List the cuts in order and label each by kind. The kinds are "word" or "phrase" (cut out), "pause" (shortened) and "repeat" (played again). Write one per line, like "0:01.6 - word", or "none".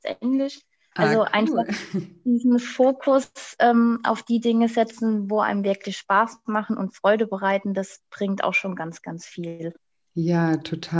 none